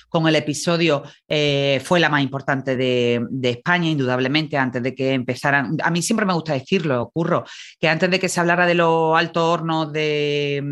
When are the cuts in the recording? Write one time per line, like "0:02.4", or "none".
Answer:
none

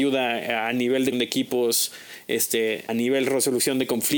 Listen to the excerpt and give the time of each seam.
0:01.1
0:02.9

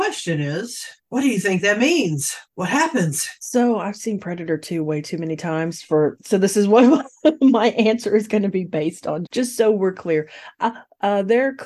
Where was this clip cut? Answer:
0:01.0
0:02.5
0:03.4
0:09.3

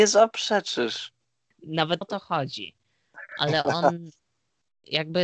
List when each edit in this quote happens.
0:02.0

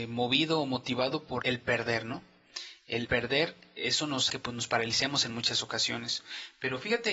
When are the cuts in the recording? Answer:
0:01.4
0:03.0
0:03.8
0:04.3

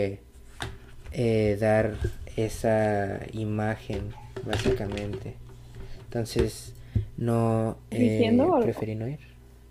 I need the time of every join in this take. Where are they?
none

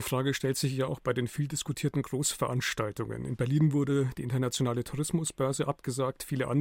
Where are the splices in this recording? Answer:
none

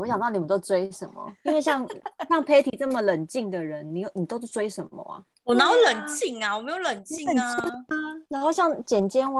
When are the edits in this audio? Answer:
0:05.4
0:08.3

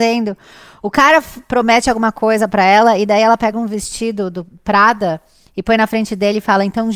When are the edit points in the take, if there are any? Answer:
none

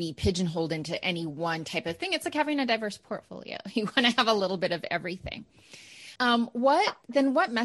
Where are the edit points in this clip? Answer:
0:06.2

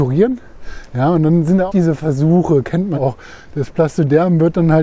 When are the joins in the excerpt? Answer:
0:01.7
0:02.9

